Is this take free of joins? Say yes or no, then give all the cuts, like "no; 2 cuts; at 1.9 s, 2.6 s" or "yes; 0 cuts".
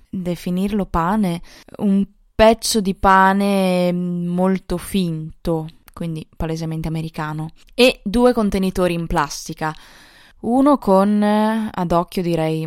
yes; 0 cuts